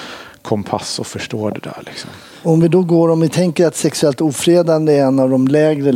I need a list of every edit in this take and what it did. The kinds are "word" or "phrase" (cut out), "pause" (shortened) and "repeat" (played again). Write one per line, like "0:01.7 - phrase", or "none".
none